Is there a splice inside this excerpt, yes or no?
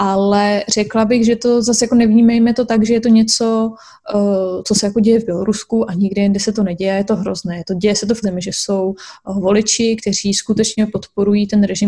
yes